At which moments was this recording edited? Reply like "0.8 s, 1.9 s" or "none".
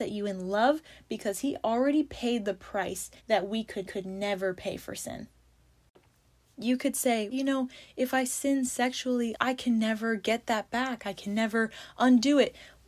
3.2 s, 3.8 s, 7.3 s, 9.3 s